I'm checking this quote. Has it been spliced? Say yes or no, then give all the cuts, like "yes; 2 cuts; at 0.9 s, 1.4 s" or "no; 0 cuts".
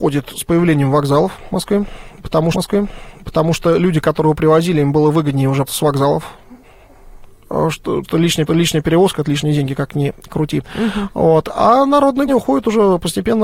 yes; 5 cuts; at 2.5 s, 5.7 s, 8.0 s, 8.5 s, 12.3 s